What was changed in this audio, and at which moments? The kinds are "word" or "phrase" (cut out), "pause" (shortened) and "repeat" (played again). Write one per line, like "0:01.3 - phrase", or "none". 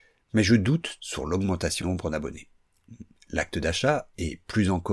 0:01.0 - phrase
0:01.8 - word